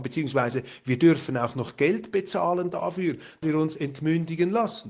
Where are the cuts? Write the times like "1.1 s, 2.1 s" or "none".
3.4 s